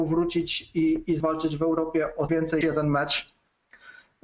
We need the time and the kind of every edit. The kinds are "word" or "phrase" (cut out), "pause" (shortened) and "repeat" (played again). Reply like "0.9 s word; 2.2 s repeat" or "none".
1.2 s word; 2.3 s word; 2.6 s word

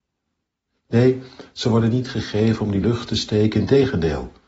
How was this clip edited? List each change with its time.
2.8 s phrase

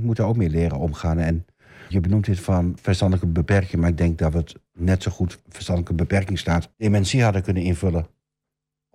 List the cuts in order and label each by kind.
1.9 s word; 2.8 s word; 5.4 s word; 6.7 s pause

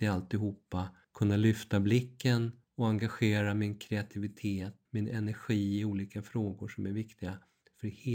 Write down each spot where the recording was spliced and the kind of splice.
1.0 s pause; 2.6 s pause; 4.9 s pause

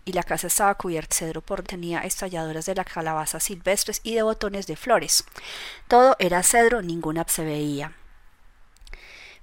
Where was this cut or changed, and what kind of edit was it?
1.1 s word; 1.6 s word; 7.3 s word

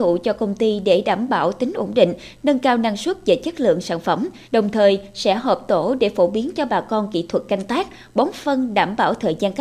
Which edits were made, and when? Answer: 4.4 s pause

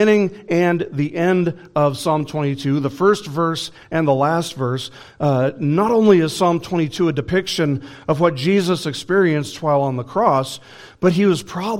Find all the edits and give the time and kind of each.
none

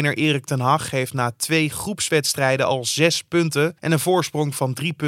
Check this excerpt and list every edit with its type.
3.8 s pause

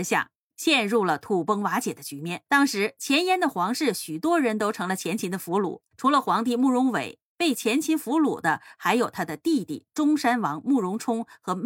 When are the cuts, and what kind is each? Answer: 2.5 s pause; 5.9 s pause

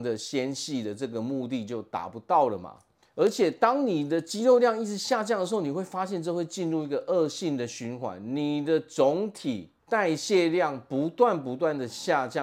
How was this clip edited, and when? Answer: none

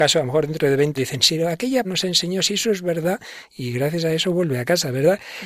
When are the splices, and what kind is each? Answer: 1.0 s word; 1.8 s word

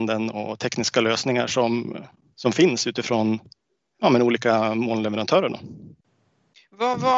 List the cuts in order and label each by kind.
none

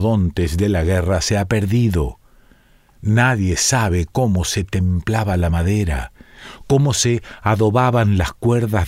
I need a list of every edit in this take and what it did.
none

